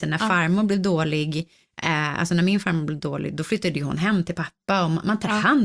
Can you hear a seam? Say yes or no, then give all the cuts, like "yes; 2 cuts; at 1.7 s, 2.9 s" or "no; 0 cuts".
no; 0 cuts